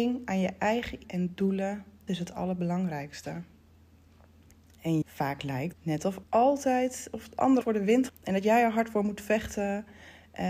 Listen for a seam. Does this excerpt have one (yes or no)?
yes